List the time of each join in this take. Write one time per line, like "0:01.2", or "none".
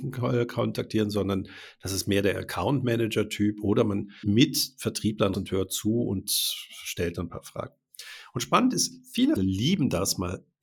0:04.2
0:05.3
0:09.4